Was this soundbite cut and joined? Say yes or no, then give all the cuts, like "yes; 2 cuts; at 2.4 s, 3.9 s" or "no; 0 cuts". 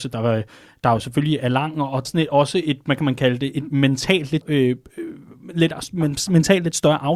yes; 3 cuts; at 1.4 s, 2.0 s, 4.4 s